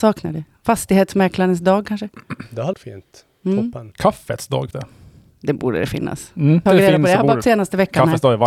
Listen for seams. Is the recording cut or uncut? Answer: cut